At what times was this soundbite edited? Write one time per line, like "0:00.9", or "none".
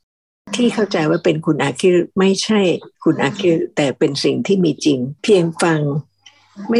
0:02.9
0:05.2